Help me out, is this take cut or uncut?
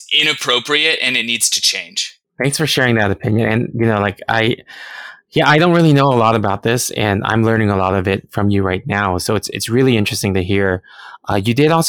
uncut